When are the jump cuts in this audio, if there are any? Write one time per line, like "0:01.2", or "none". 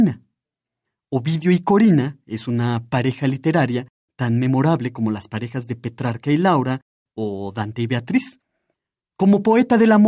none